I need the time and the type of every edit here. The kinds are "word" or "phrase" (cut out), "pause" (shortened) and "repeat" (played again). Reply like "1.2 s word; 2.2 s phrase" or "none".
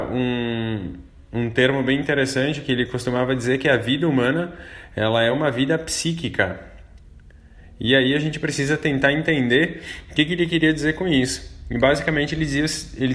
none

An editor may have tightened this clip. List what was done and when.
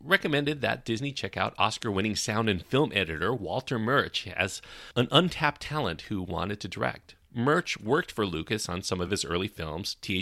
none

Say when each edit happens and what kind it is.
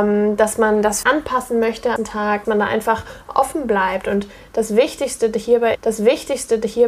1.0 s word; 2.0 s word; 2.4 s word; 5.7 s repeat

